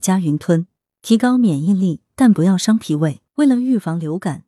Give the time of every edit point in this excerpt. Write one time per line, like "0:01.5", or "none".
0:03.3

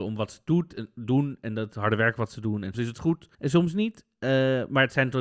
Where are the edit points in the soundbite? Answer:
0:02.7
0:03.3

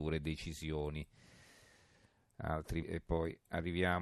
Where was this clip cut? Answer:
0:02.8

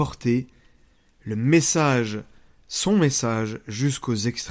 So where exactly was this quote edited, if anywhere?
none

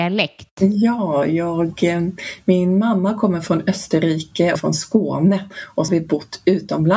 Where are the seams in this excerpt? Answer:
0:04.6
0:05.9

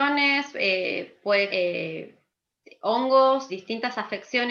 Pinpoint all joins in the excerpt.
0:01.5
0:03.5

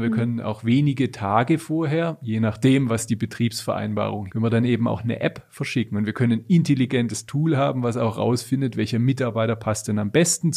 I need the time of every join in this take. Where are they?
0:04.3

